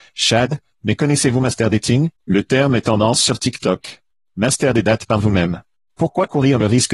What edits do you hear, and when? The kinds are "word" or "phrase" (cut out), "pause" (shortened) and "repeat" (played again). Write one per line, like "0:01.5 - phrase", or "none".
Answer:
0:02.2 - pause
0:04.7 - phrase